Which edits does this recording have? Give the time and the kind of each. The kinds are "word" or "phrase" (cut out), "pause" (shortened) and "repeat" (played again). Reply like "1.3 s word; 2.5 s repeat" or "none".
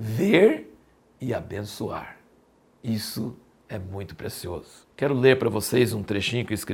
4.9 s pause